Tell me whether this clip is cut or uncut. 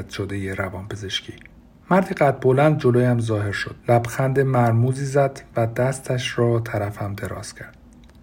cut